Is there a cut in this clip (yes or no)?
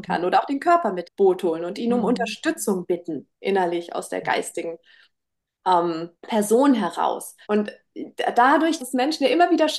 yes